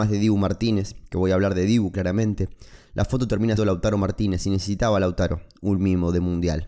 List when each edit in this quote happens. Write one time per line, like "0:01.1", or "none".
0:03.6